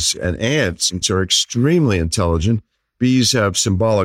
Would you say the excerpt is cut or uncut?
cut